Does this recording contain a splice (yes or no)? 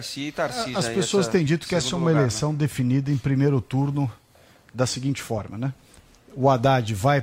no